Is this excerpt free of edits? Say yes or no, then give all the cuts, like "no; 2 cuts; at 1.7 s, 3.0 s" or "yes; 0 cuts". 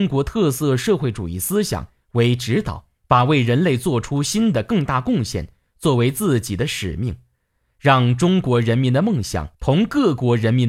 no; 2 cuts; at 3.0 s, 9.5 s